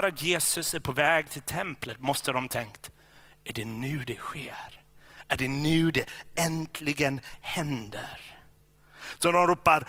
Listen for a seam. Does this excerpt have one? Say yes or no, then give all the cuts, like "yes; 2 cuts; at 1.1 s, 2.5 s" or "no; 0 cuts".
no; 0 cuts